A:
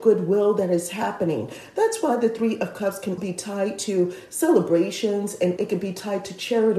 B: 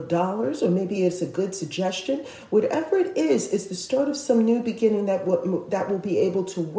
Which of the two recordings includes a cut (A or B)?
A